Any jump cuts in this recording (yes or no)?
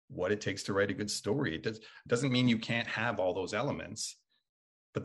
no